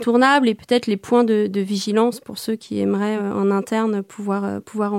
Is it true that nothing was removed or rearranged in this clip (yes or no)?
yes